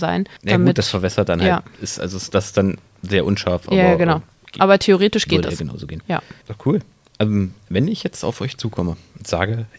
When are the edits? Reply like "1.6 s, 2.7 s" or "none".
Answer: none